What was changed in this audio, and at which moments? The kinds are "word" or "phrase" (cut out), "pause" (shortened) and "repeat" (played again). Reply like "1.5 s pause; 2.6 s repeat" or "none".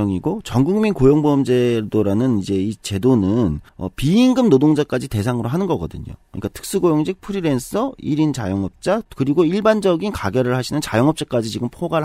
3.7 s pause

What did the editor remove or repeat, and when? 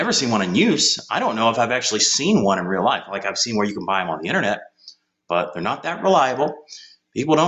none

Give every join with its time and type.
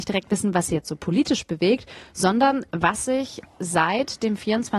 none

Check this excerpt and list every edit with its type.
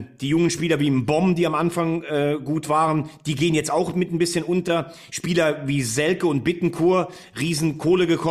none

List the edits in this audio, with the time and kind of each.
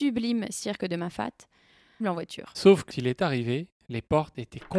2.0 s word; 2.9 s word

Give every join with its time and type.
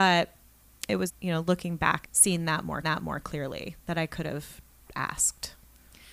1.1 s word; 2.0 s phrase; 2.8 s repeat

